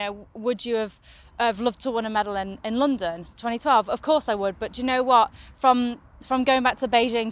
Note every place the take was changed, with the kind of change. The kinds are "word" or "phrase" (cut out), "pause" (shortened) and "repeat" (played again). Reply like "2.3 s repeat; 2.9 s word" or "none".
none

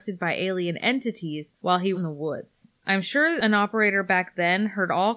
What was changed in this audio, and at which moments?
1.9 s phrase

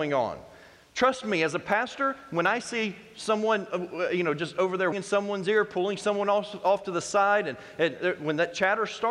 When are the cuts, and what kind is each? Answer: 4.9 s word

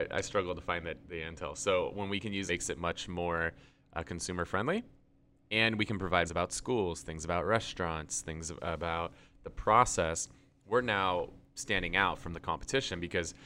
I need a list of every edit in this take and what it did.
2.5 s phrase; 6.2 s phrase

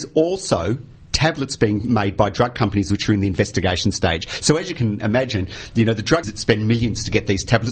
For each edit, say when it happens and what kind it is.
6.2 s word

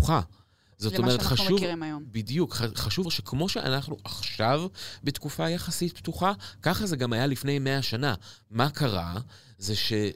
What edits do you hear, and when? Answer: 3.1 s word

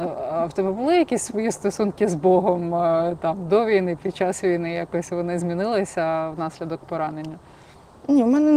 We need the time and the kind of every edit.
none

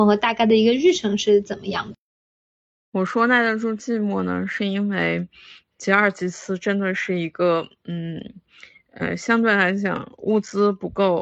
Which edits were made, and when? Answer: none

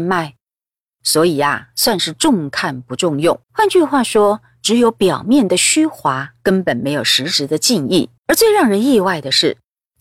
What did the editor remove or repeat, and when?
3.4 s pause; 6.4 s pause; 8.2 s pause

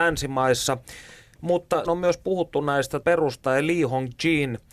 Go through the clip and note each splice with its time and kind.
1.8 s word; 3.0 s word

